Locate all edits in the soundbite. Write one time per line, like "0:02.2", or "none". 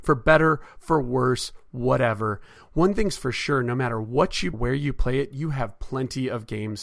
0:04.5